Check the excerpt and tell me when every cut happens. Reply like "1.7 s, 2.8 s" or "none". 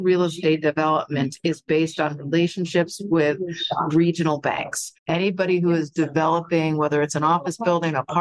5.0 s